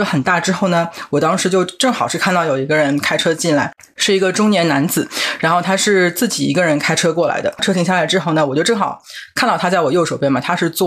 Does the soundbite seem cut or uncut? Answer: uncut